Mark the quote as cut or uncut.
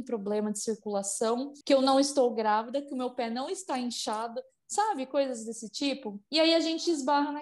cut